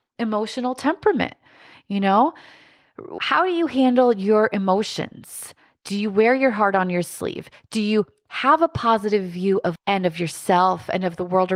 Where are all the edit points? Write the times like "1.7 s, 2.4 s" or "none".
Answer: 3.2 s, 9.8 s